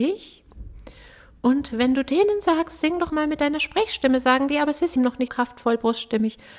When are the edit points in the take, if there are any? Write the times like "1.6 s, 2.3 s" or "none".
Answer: 3.1 s, 5.0 s, 5.3 s